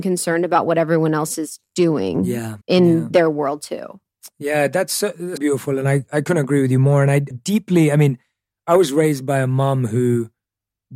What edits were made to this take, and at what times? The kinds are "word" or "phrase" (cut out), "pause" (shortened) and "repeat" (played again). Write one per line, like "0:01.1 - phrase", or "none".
0:02.6 - pause
0:05.4 - word

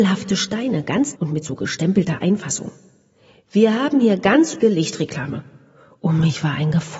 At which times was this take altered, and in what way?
0:01.2 - word
0:04.6 - word

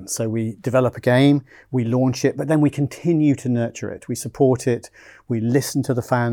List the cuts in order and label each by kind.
none

